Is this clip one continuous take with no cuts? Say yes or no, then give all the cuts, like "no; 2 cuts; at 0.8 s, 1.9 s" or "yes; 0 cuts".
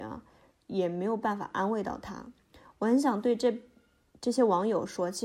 yes; 0 cuts